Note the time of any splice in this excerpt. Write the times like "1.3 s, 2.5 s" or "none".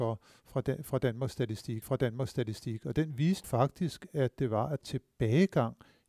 1.8 s, 3.4 s, 4.8 s